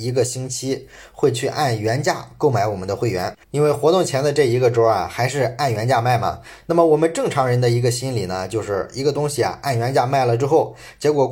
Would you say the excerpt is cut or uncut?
cut